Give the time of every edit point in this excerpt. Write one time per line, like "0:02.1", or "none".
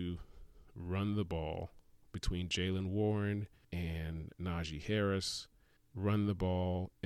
0:03.6
0:05.8

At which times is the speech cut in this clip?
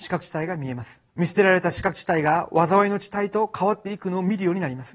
0:01.1

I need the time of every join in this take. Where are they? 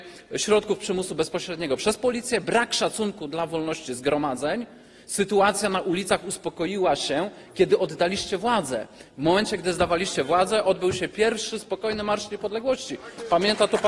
none

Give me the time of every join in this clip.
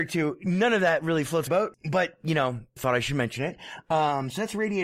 0:01.5
0:02.8

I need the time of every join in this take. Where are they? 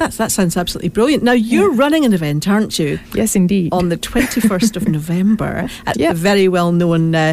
0:05.9

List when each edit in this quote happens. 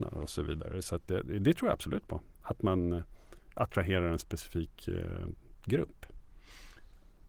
none

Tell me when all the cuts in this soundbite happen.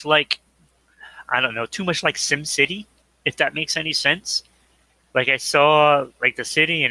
0:03.0

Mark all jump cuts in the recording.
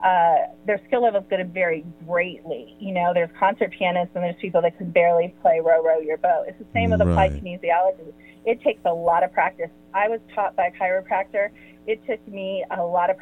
none

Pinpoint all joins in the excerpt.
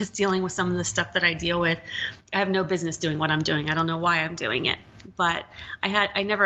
none

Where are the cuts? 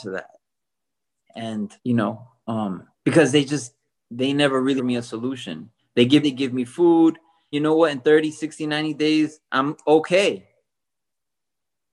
0:01.8
0:02.9
0:04.0
0:04.8
0:05.8
0:06.2
0:07.5

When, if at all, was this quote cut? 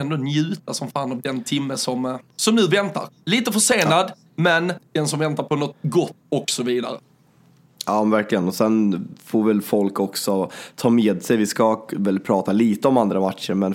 none

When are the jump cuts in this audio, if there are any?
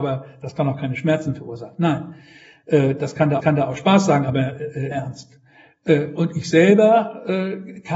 0:03.4
0:04.9

